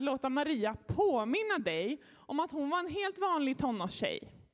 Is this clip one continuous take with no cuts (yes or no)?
yes